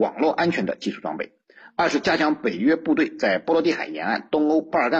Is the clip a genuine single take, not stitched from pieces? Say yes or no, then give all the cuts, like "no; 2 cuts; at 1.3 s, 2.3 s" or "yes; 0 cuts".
yes; 0 cuts